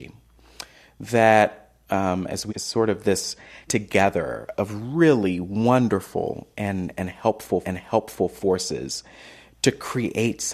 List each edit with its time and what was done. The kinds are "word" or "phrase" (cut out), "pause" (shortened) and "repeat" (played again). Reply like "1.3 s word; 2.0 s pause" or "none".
2.5 s phrase; 3.7 s word; 4.6 s word; 7.6 s repeat